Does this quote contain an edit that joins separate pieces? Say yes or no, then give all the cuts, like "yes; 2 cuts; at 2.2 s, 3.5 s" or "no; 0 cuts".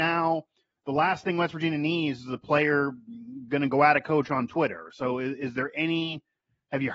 no; 0 cuts